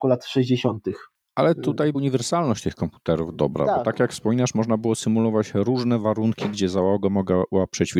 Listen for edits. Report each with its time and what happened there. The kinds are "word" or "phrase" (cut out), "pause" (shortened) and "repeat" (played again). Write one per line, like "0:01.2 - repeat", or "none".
0:01.9 - word